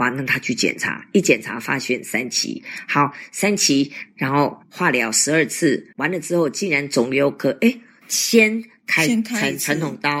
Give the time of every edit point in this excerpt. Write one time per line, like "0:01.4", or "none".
0:04.6
0:05.9
0:08.0